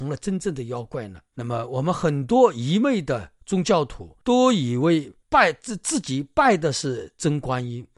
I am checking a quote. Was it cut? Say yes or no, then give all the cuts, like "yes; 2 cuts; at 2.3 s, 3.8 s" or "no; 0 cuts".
yes; 3 cuts; at 3.4 s, 4.2 s, 5.2 s